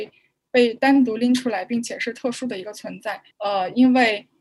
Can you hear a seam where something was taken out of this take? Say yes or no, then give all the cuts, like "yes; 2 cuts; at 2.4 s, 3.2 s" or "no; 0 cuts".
yes; 1 cut; at 3.3 s